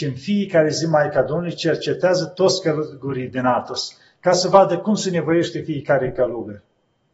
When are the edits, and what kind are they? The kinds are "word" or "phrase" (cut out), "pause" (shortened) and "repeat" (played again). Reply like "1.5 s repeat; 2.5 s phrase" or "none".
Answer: none